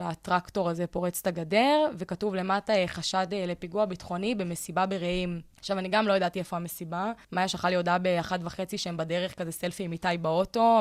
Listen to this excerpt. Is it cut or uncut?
cut